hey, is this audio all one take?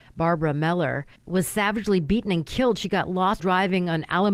no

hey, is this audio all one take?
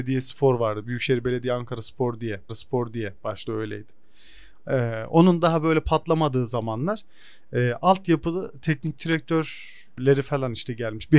no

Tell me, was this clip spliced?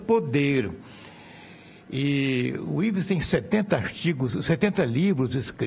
no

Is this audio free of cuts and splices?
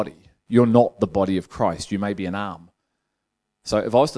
yes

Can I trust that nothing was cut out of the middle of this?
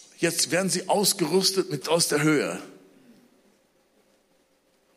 no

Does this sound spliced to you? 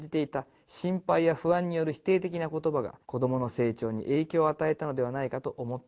yes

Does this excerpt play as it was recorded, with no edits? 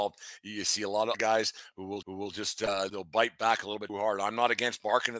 no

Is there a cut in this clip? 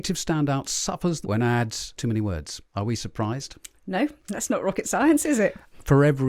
yes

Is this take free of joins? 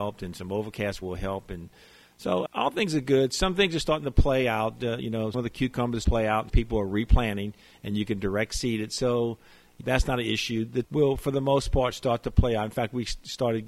no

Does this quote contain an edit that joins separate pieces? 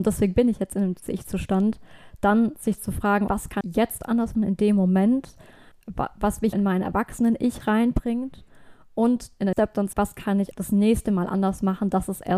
yes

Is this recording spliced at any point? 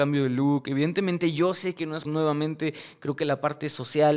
yes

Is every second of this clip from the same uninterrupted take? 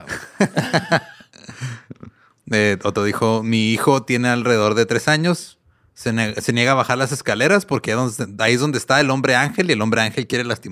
yes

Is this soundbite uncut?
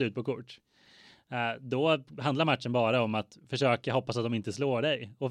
yes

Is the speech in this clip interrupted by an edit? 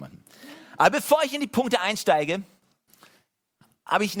no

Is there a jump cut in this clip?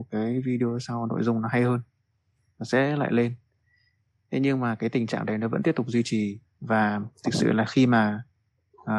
no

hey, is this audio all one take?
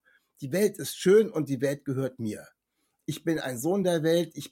yes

